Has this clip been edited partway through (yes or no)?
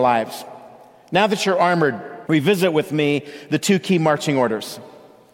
yes